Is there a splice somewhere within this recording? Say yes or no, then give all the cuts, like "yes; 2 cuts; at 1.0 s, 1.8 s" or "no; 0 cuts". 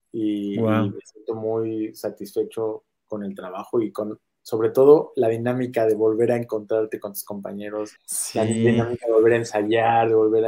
yes; 1 cut; at 8.0 s